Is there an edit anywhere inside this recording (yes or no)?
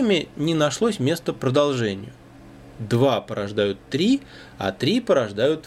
no